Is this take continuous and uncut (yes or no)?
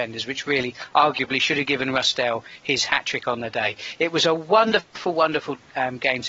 yes